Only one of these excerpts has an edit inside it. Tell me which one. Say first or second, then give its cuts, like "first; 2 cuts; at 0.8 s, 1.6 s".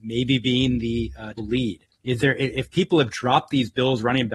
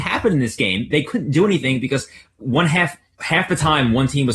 first; 2 cuts; at 1.4 s, 1.9 s